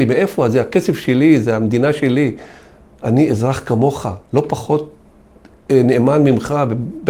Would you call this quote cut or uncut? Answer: uncut